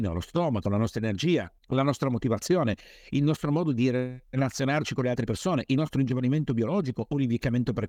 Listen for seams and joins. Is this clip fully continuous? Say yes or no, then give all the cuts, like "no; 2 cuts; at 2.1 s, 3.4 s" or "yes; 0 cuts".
no; 2 cuts; at 1.6 s, 4.2 s